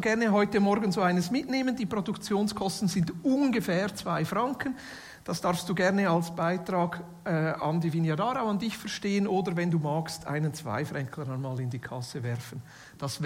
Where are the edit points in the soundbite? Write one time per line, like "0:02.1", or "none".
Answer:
none